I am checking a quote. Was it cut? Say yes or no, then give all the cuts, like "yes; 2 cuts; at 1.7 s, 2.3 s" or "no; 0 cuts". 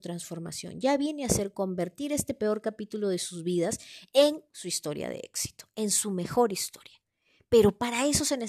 no; 0 cuts